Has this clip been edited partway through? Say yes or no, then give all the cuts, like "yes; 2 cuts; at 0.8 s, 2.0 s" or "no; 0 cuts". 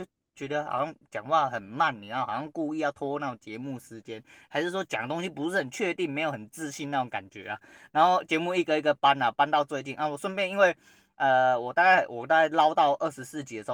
no; 0 cuts